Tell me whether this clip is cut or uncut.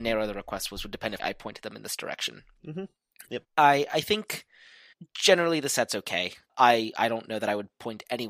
cut